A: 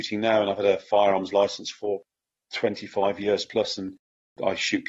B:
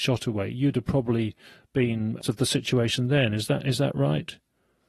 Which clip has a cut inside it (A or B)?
B